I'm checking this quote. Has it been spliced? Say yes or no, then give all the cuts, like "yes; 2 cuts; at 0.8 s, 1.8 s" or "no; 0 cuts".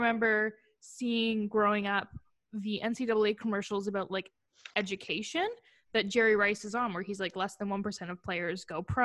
no; 0 cuts